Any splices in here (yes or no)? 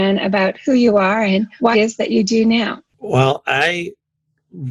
yes